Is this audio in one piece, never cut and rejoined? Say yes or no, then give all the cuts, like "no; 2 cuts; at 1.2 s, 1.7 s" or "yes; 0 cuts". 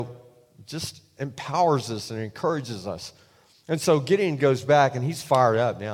yes; 0 cuts